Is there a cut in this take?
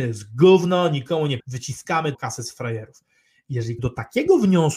yes; 3 cuts; at 1.4 s, 2.1 s, 3.8 s

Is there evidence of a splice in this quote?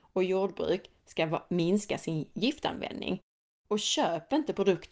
no; 0 cuts

